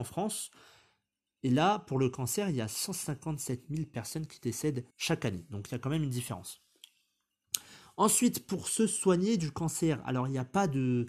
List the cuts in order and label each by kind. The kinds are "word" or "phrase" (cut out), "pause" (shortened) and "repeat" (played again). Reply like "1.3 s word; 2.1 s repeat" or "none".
4.9 s pause